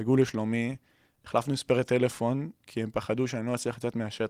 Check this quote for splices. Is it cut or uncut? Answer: uncut